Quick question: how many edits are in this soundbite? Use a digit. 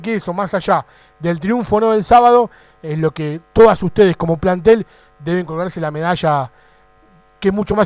0